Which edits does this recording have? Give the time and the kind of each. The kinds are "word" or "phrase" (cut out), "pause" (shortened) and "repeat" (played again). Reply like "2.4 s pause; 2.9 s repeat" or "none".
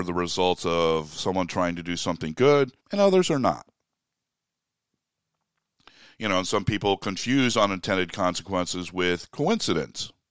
2.8 s pause